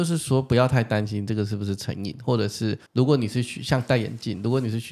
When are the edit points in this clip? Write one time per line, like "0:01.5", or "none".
0:02.9